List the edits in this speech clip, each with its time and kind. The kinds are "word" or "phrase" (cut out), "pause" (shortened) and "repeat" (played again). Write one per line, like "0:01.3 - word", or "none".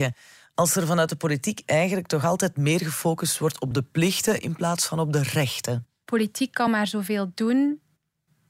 none